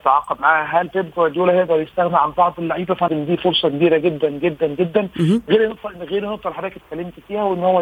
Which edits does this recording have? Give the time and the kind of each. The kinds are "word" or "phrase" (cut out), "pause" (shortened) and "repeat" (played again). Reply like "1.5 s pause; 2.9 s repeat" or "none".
3.1 s word